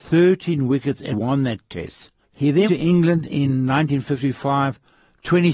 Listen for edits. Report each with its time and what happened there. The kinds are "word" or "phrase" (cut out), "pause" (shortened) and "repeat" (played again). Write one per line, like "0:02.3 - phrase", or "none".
0:01.1 - word
0:02.2 - pause
0:02.7 - word